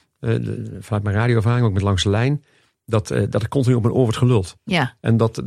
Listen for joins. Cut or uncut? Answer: uncut